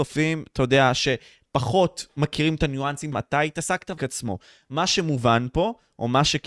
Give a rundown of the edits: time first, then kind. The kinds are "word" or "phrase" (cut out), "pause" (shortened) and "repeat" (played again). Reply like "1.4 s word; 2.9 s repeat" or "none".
2.1 s pause; 3.1 s word; 4.0 s phrase